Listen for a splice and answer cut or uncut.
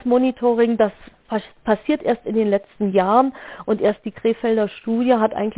uncut